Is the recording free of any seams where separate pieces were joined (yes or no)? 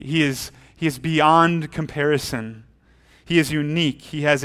yes